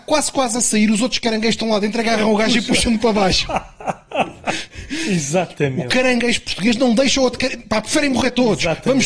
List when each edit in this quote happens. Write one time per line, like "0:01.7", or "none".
none